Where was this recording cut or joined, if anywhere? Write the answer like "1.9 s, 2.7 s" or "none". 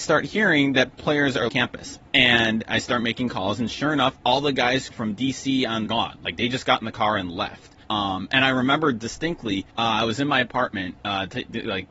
1.5 s, 2.1 s, 4.2 s, 4.9 s, 5.9 s, 7.8 s, 9.7 s, 11.0 s